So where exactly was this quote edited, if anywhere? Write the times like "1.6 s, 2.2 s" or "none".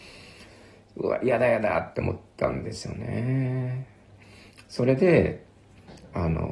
none